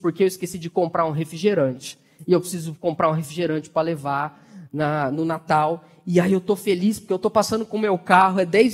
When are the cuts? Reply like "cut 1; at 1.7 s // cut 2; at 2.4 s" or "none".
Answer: none

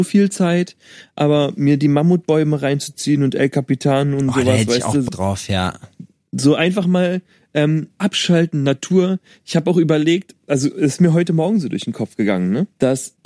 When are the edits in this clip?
cut 1; at 5.1 s

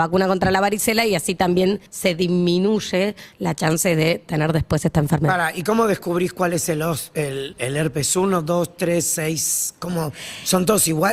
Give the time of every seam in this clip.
cut 1; at 1.9 s

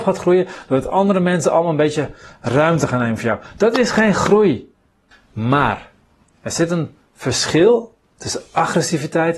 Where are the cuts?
none

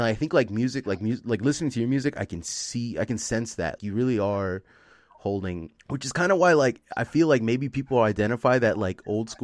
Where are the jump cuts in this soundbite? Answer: cut 1; at 3.8 s // cut 2; at 5.8 s

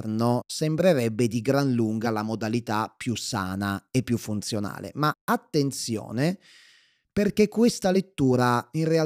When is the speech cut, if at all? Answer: none

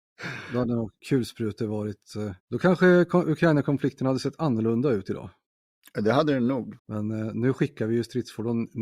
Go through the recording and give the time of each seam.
cut 1; at 1.0 s // cut 2; at 2.4 s // cut 3; at 6.8 s

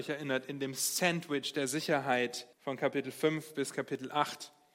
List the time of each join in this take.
cut 1; at 2.5 s

